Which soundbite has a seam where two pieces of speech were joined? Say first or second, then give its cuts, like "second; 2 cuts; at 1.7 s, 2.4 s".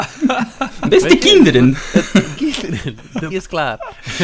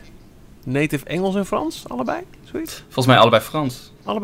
first; 2 cuts; at 2.4 s, 3.3 s